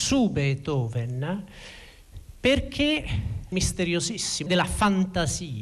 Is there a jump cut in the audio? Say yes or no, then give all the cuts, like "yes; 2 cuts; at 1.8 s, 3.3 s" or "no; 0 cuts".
yes; 2 cuts; at 3.5 s, 4.5 s